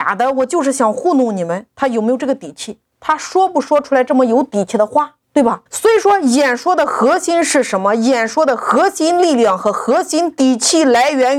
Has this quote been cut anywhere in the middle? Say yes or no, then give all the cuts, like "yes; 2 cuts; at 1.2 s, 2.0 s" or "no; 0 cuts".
yes; 2 cuts; at 5.2 s, 5.7 s